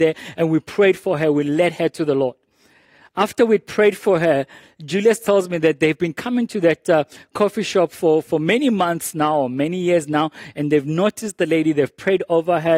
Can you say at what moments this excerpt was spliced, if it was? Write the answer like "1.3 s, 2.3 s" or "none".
none